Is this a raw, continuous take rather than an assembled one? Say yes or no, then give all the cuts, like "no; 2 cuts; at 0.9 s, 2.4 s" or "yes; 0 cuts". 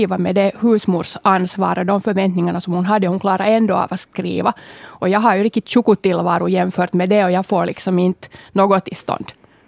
yes; 0 cuts